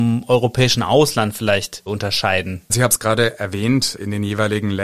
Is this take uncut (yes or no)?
yes